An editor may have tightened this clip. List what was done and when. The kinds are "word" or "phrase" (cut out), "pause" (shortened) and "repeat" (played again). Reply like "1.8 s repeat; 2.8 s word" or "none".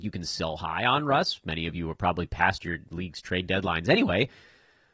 none